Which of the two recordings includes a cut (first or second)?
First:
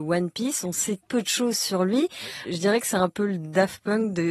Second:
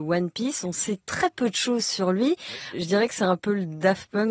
first